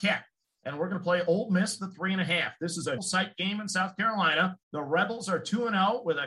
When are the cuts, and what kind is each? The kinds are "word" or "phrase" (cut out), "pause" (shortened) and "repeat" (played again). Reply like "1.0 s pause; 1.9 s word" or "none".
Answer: 1.8 s word; 3.0 s word; 4.6 s pause